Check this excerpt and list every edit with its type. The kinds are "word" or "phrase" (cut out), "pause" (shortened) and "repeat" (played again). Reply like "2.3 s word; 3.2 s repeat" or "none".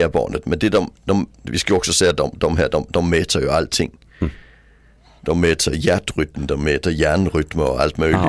none